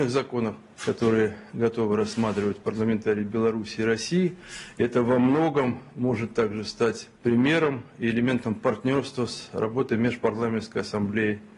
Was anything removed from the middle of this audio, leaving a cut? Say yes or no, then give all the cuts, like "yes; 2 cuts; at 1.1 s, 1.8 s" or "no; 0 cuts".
no; 0 cuts